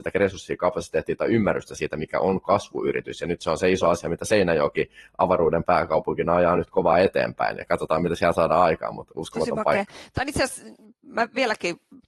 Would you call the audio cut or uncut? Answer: uncut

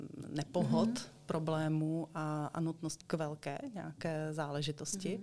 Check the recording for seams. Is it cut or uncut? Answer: cut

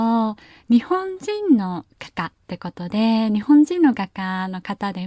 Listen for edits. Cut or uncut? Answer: cut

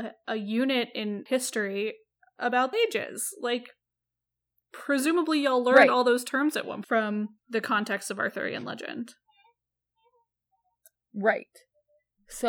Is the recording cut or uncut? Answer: cut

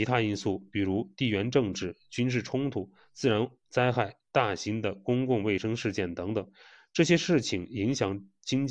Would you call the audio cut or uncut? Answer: uncut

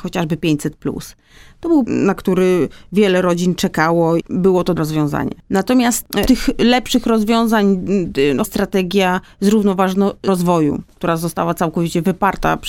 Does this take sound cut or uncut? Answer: cut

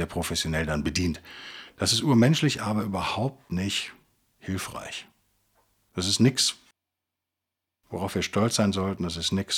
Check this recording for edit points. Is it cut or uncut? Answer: uncut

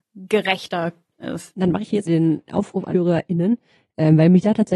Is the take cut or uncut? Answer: cut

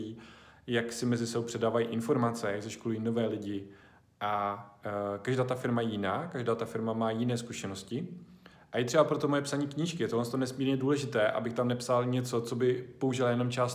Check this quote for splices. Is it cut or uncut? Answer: uncut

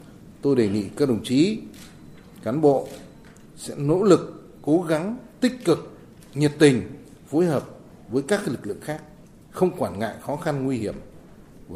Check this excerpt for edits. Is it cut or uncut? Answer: uncut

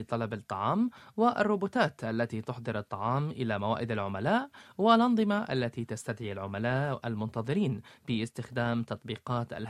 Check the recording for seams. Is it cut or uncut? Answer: uncut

